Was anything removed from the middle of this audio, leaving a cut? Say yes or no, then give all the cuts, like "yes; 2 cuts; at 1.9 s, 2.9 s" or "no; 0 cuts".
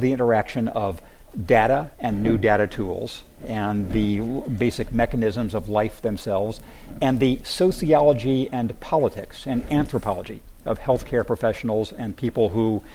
yes; 1 cut; at 1.9 s